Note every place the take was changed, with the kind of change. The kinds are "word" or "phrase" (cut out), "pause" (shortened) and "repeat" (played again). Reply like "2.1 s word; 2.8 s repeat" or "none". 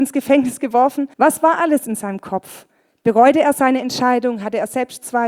1.1 s pause; 2.8 s pause